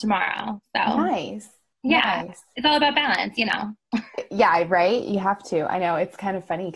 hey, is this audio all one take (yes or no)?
yes